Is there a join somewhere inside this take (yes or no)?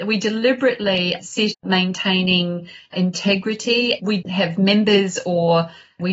yes